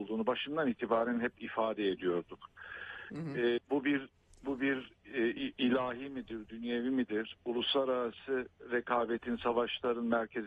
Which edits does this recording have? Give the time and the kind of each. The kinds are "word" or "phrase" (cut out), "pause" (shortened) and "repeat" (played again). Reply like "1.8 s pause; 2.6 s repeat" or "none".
3.6 s word; 4.1 s pause